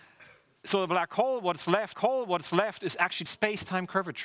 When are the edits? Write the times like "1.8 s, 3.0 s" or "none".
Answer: 1.9 s, 3.3 s

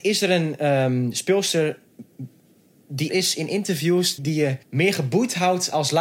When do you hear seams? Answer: 3.1 s, 4.2 s, 4.6 s

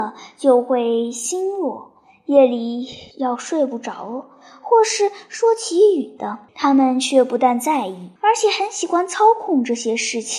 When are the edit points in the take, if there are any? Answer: 3.1 s, 6.5 s, 8.2 s

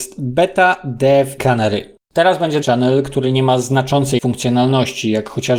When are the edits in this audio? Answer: 1.4 s, 2.6 s, 4.2 s

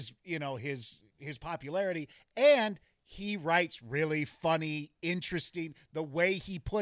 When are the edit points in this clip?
1.1 s

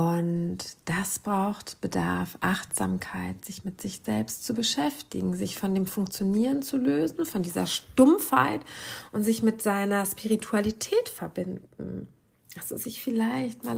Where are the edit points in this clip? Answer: none

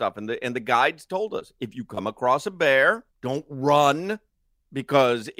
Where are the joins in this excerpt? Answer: 3.1 s

